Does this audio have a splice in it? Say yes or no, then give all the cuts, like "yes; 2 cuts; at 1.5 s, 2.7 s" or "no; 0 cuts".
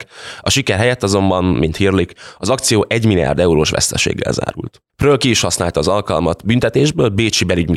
no; 0 cuts